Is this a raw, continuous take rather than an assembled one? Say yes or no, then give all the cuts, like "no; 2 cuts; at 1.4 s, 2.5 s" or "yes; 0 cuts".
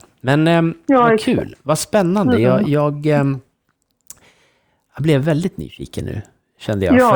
yes; 0 cuts